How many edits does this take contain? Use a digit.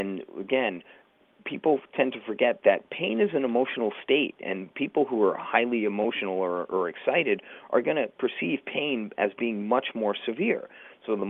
0